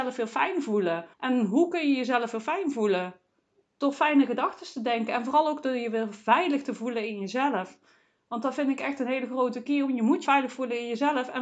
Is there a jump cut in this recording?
yes; 3 cuts; at 1.1 s, 3.5 s, 10.3 s

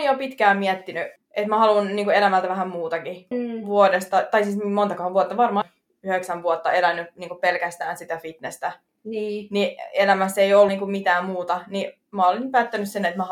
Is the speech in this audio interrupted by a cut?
yes; 3 cuts; at 3.3 s, 5.6 s, 10.7 s

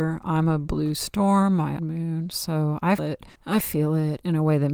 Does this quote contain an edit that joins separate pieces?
yes; 3 cuts; at 1.8 s, 3.0 s, 3.4 s

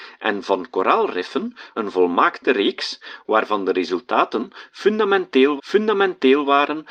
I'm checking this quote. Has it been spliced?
yes; 2 cuts; at 1.7 s, 5.6 s

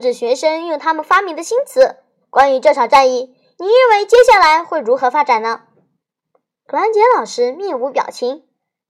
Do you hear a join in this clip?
no; 0 cuts

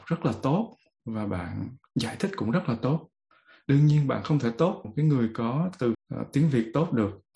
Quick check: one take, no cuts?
no; 2 cuts; at 4.8 s, 5.9 s

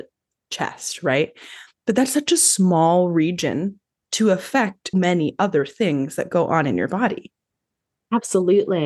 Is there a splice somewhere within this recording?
yes; 1 cut; at 4.9 s

